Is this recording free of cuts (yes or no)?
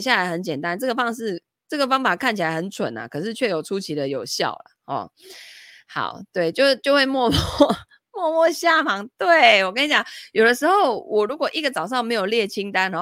yes